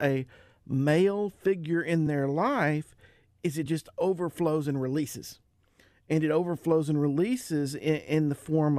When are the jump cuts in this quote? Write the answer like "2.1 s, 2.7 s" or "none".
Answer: none

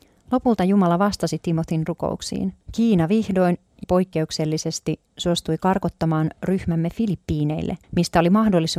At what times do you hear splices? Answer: 2.6 s, 3.8 s, 7.8 s

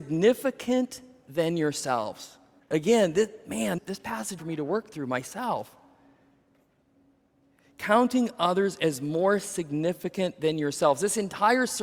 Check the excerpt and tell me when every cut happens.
2.6 s, 3.8 s, 4.4 s

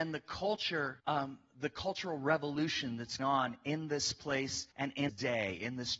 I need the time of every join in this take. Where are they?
1.0 s, 3.2 s, 4.7 s, 5.1 s

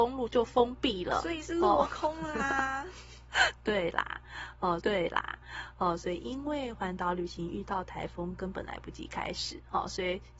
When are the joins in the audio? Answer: 4.8 s

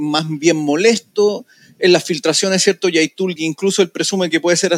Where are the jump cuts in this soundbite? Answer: 3.4 s

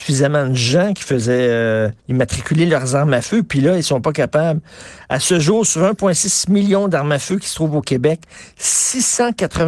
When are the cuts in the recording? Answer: 2.0 s

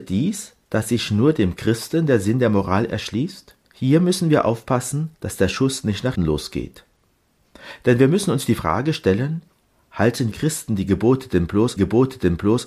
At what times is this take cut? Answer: 3.6 s, 5.2 s, 6.2 s, 10.3 s, 11.8 s

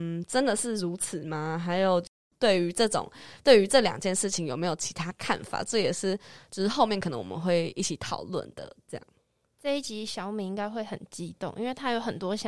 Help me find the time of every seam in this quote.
none

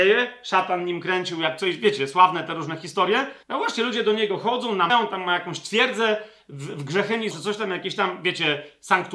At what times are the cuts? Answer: 3.4 s, 4.9 s, 7.3 s

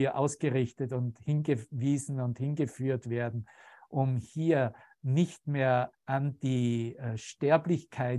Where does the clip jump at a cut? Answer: 5.9 s

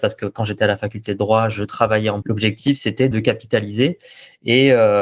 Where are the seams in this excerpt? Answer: 2.2 s, 3.1 s

